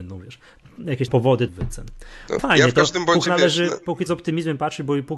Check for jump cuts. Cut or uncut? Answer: cut